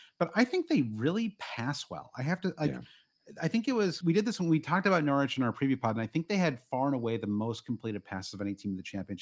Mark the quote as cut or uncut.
cut